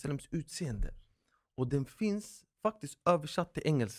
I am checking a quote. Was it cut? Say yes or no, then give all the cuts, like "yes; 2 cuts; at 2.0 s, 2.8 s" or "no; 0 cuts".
no; 0 cuts